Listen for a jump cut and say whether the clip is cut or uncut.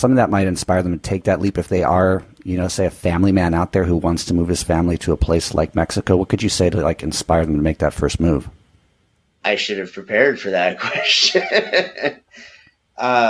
uncut